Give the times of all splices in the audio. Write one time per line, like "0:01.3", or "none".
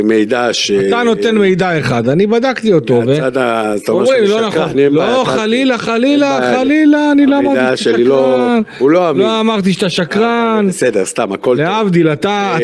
none